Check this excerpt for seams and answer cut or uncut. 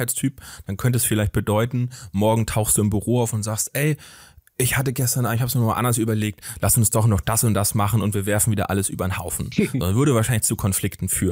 uncut